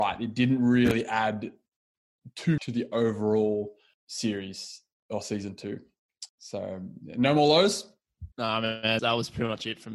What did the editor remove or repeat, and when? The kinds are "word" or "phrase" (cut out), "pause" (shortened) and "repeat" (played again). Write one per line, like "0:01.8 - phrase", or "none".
0:02.6 - word
0:03.9 - pause
0:06.3 - pause
0:08.3 - pause
0:09.0 - word